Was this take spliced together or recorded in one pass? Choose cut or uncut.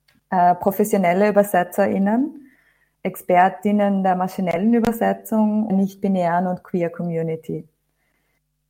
cut